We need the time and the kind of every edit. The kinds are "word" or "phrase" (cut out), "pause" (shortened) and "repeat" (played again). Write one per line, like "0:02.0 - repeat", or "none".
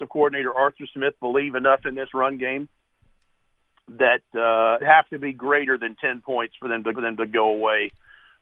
0:04.8 - phrase
0:06.9 - repeat